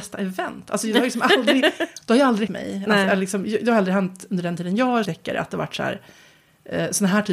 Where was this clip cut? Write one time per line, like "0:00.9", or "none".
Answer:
0:02.5
0:05.0